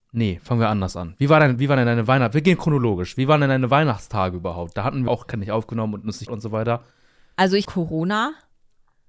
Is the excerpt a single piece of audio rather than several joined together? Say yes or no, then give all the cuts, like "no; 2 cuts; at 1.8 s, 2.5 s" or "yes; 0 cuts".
no; 4 cuts; at 1.6 s, 5.1 s, 6.3 s, 7.6 s